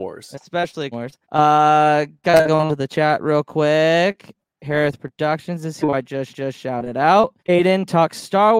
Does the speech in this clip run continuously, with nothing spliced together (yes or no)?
no